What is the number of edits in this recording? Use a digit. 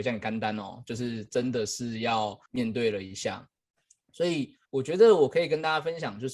2